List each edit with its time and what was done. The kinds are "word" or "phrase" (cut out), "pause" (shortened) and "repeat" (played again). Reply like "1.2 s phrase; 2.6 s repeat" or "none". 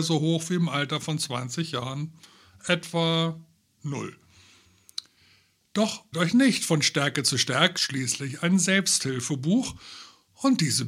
6.1 s word; 7.8 s word